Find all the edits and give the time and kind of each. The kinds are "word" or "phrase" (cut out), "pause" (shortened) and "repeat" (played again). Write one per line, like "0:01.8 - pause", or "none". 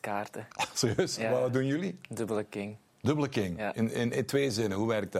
none